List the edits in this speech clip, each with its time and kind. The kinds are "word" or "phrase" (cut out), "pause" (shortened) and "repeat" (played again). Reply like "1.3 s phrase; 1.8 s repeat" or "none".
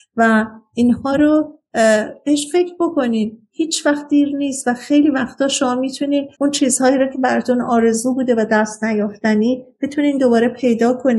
6.3 s pause